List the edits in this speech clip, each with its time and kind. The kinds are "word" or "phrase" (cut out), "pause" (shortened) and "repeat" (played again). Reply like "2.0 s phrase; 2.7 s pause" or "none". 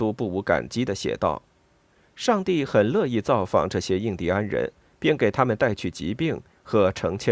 none